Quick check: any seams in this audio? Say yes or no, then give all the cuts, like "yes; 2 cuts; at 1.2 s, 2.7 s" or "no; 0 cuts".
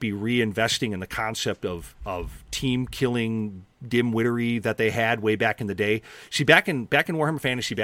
no; 0 cuts